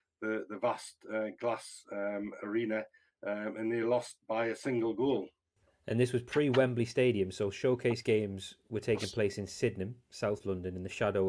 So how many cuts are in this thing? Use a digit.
0